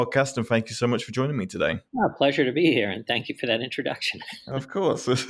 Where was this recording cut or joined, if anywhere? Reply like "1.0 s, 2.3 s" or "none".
1.9 s